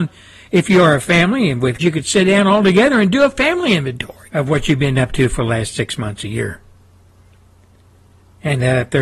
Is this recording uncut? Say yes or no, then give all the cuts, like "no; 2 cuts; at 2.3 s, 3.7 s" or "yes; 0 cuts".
no; 2 cuts; at 1.8 s, 4.3 s